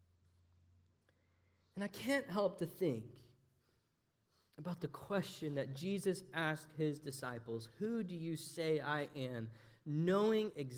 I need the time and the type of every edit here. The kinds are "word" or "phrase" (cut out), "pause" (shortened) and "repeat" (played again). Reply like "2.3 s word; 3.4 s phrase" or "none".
none